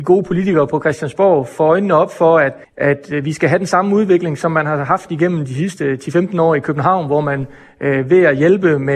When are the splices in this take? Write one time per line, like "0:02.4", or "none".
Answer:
0:02.6